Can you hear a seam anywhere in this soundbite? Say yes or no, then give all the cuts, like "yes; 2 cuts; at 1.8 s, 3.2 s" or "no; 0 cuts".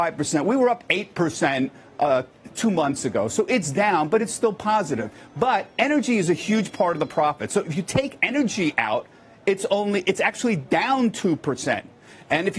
no; 0 cuts